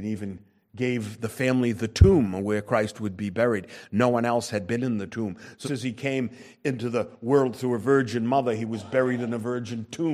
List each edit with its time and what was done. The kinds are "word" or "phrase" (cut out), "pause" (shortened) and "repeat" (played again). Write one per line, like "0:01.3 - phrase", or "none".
0:05.6 - word